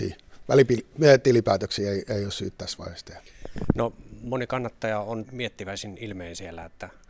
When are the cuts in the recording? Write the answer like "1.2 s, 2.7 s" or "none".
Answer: 5.2 s